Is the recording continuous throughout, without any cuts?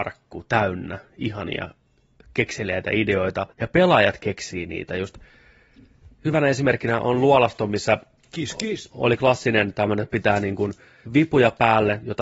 no; 2 cuts; at 3.5 s, 11.1 s

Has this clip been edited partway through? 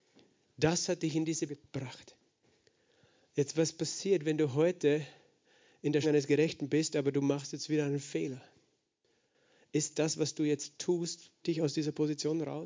yes; 3 cuts; at 1.5 s, 6.0 s, 11.4 s

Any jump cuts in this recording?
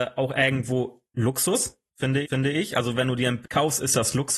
yes; 2 cuts; at 2.2 s, 3.4 s

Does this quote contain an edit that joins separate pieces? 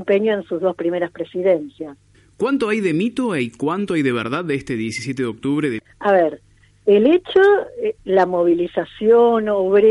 no; 0 cuts

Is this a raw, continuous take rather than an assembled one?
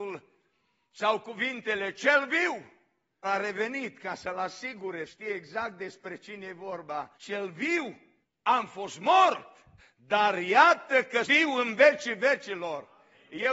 no; 6 cuts; at 3.2 s, 5.1 s, 7.1 s, 8.2 s, 9.8 s, 11.2 s

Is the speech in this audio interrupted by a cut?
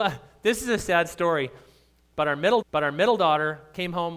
yes; 1 cut; at 2.6 s

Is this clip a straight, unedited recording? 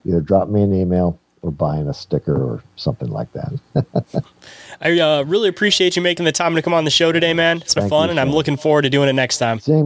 no; 1 cut; at 7.8 s

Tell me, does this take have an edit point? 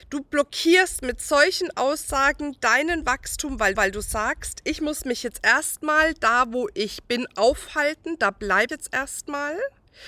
yes; 2 cuts; at 3.7 s, 8.7 s

